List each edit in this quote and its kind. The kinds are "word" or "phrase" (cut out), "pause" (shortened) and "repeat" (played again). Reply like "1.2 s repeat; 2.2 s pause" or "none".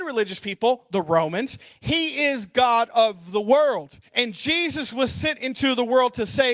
4.1 s pause

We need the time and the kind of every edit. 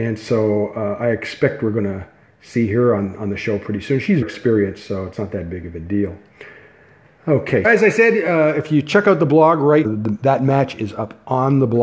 4.2 s word; 7.6 s word; 9.8 s word

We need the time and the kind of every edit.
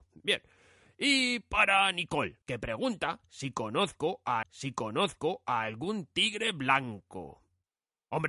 2.4 s pause; 4.4 s repeat

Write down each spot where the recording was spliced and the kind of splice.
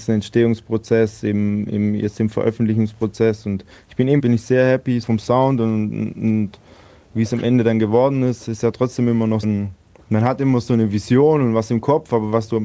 4.2 s phrase; 5.0 s word; 9.4 s word

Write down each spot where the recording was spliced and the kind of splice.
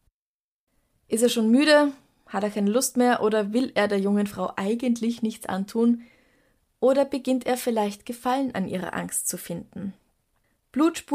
none

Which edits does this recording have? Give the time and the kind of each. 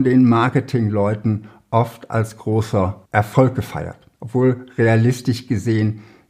3.0 s pause; 4.1 s pause

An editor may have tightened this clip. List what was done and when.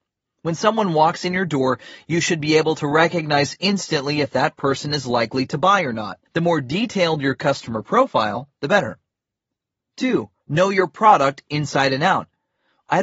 6.3 s pause; 10.4 s pause

